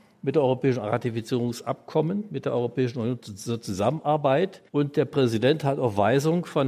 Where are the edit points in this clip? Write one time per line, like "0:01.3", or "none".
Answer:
0:04.7

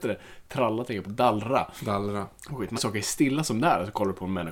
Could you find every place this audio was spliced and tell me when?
0:01.0
0:02.8

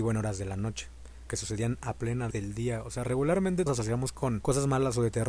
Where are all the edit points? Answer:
0:01.3
0:02.3
0:03.7

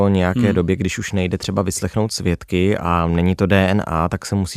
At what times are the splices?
none

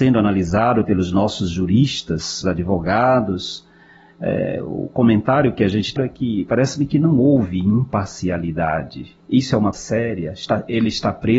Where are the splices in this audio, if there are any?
0:02.4
0:06.0
0:09.7

